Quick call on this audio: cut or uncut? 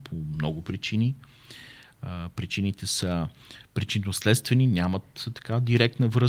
uncut